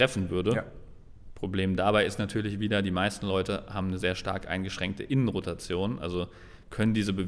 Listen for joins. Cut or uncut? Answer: uncut